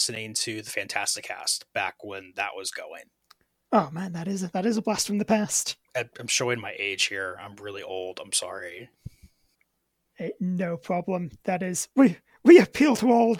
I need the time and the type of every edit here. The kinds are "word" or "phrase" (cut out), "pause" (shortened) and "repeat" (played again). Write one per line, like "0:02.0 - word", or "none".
0:03.2 - pause
0:05.8 - pause
0:09.5 - pause